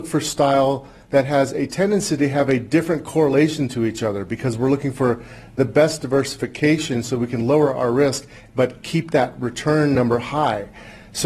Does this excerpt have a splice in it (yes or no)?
no